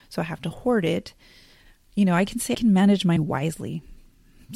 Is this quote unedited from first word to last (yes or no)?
no